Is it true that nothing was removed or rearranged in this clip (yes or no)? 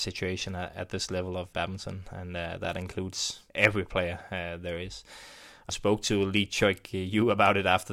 no